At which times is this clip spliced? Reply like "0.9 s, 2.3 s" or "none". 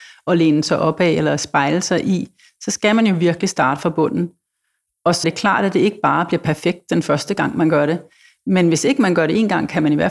5.2 s